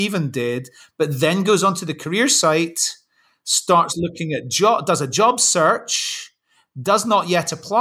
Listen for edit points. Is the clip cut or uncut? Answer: uncut